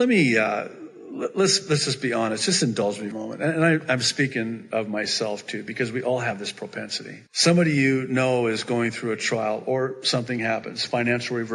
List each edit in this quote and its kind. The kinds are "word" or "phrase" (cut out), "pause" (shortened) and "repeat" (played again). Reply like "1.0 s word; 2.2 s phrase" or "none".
3.1 s phrase; 7.3 s pause